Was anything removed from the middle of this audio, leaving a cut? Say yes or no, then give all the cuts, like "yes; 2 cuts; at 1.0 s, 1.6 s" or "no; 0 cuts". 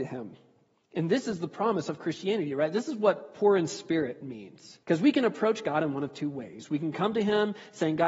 yes; 1 cut; at 4.8 s